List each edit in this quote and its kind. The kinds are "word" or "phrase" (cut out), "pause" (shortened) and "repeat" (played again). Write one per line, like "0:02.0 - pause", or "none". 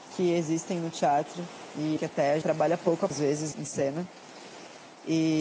0:02.0 - word
0:02.4 - word
0:03.1 - word
0:03.5 - word